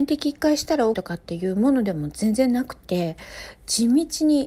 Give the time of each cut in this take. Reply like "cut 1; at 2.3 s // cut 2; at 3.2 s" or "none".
cut 1; at 0.9 s